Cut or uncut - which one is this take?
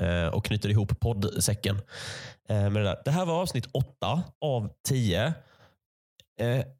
cut